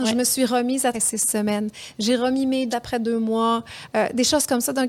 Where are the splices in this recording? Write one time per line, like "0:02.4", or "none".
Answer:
0:00.9
0:02.7